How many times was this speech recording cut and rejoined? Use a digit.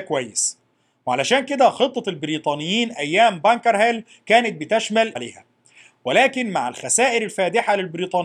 1